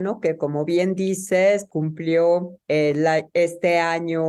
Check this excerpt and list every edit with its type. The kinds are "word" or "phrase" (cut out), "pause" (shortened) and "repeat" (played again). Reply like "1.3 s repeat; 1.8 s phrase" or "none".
1.7 s word